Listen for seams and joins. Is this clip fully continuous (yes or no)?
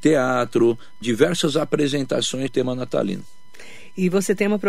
no